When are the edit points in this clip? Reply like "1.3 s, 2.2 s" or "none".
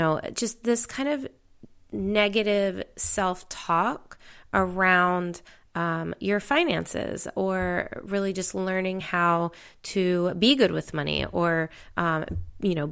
none

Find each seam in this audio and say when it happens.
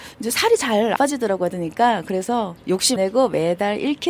1.0 s, 1.5 s, 3.0 s

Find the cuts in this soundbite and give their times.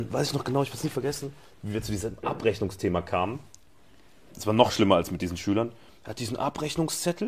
none

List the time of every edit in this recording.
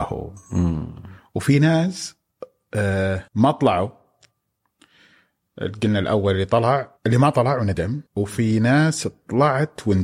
3.3 s, 7.0 s, 8.1 s

